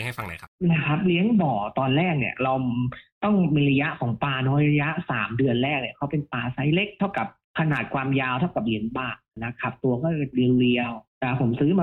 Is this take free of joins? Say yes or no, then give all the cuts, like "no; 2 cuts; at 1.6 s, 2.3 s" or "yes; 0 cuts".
yes; 0 cuts